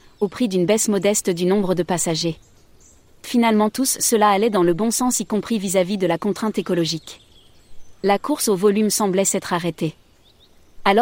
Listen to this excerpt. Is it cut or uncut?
uncut